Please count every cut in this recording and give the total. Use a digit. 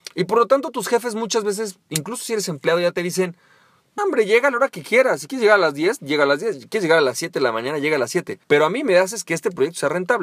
2